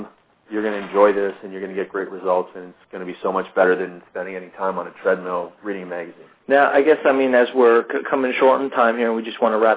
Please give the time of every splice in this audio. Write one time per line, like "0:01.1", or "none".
0:02.8
0:06.4